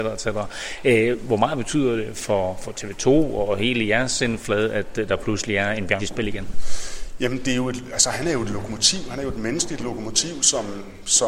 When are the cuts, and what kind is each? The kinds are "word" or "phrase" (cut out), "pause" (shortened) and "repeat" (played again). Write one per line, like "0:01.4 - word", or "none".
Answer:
0:06.0 - word